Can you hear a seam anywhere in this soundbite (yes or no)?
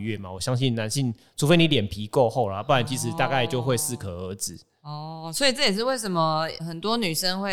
yes